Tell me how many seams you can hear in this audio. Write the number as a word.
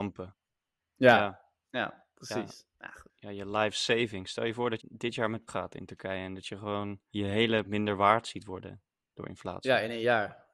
four